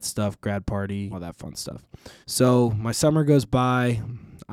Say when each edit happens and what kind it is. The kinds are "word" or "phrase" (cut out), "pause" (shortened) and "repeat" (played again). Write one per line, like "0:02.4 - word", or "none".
0:01.1 - word
0:02.2 - pause